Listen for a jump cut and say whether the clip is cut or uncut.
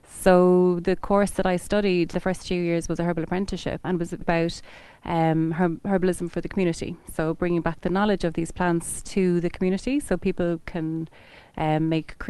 cut